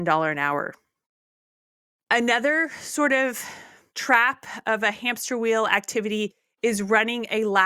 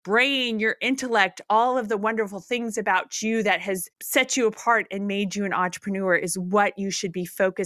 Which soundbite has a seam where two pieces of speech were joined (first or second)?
second